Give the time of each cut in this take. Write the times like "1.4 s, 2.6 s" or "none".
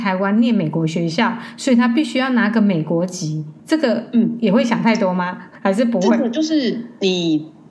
3.6 s, 5.6 s